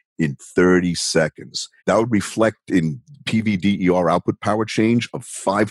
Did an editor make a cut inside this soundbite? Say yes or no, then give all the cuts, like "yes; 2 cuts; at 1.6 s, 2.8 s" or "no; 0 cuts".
yes; 1 cut; at 1.8 s